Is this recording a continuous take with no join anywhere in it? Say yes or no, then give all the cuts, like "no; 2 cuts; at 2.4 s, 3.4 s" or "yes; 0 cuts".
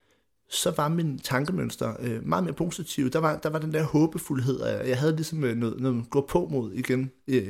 yes; 0 cuts